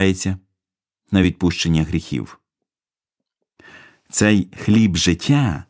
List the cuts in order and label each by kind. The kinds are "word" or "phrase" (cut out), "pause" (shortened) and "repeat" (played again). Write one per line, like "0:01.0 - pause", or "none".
none